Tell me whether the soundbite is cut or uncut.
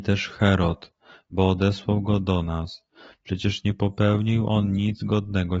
uncut